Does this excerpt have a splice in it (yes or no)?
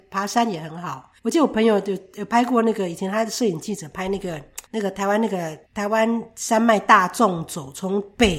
yes